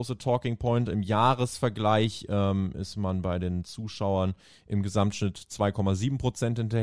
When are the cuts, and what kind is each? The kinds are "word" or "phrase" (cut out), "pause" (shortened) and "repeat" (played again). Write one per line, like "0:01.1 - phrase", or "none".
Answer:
none